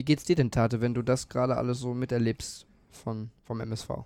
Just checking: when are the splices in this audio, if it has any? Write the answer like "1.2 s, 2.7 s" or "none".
none